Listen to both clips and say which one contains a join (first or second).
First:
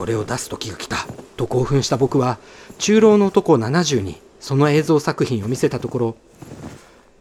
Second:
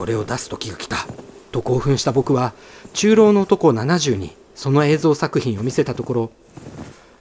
first